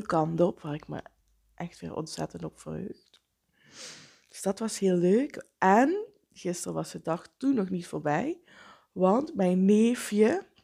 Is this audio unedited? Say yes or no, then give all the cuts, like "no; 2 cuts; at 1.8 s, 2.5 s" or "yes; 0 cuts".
yes; 0 cuts